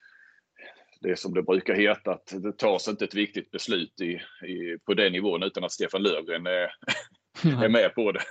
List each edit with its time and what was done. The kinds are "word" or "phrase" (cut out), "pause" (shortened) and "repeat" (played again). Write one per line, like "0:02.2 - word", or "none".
none

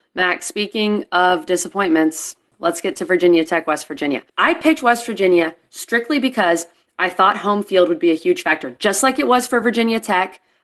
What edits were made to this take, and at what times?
0:04.3 - pause

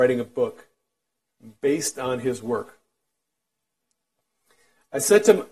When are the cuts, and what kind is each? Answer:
none

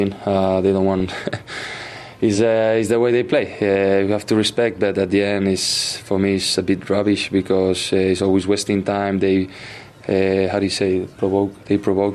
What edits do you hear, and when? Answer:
none

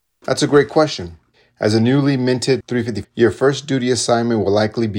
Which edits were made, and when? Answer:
0:01.3 - pause
0:03.0 - word

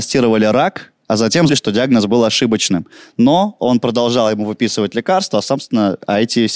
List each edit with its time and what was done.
0:01.5 - word

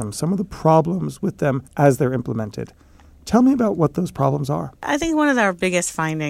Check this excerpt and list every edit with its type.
0:01.7 - pause

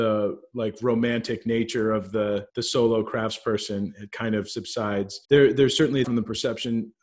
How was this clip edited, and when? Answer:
0:02.5 - pause
0:05.2 - pause
0:06.0 - word

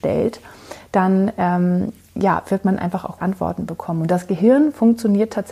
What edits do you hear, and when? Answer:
0:03.2 - word

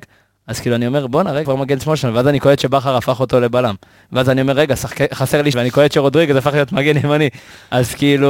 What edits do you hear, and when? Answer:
0:01.4 - word
0:05.5 - word

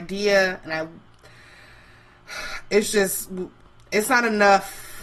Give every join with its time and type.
none

